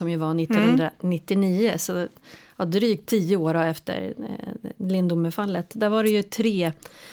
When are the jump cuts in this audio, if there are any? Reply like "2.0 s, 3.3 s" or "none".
none